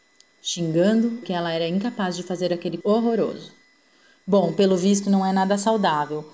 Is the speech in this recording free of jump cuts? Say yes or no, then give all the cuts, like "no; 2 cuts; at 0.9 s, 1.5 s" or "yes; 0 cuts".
no; 3 cuts; at 1.2 s, 2.8 s, 5.0 s